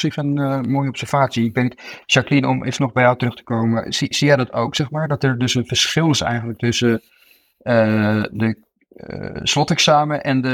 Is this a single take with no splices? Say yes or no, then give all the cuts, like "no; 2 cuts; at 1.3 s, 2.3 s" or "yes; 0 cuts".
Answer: yes; 0 cuts